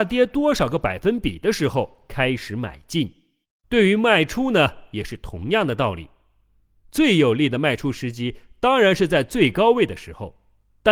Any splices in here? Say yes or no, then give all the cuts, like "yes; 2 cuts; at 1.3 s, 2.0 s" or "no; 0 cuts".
yes; 1 cut; at 3.4 s